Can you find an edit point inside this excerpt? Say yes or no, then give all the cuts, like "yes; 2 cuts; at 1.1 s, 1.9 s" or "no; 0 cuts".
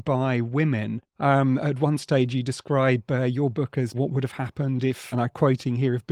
yes; 3 cuts; at 1.1 s, 3.9 s, 5.1 s